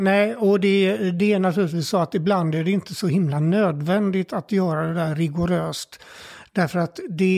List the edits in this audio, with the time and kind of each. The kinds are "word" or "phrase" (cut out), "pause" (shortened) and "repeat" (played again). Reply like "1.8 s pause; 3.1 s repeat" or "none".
none